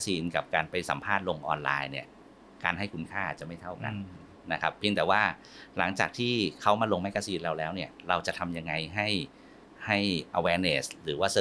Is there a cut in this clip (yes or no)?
no